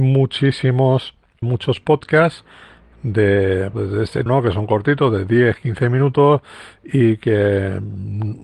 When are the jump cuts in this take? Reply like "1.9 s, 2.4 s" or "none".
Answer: 1.4 s, 3.7 s, 4.3 s